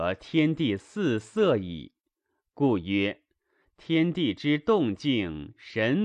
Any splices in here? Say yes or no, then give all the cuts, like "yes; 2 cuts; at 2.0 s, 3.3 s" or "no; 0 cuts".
no; 0 cuts